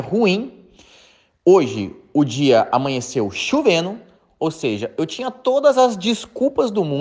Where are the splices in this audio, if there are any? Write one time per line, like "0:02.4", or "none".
none